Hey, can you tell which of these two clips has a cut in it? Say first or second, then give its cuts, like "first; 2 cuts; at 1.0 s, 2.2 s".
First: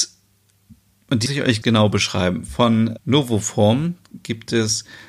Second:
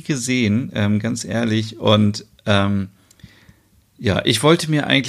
first; 3 cuts; at 1.3 s, 1.6 s, 3.0 s